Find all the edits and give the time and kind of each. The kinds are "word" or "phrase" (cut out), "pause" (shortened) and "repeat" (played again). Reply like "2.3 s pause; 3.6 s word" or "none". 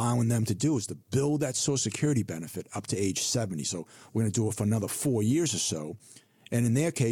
none